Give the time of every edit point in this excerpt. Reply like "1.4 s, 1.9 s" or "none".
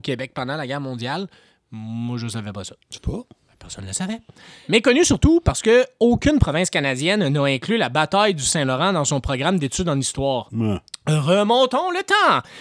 3.0 s